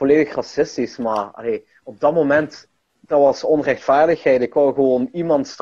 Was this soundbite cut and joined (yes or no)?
no